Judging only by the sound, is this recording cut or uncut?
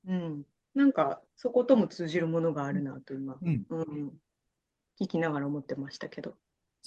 uncut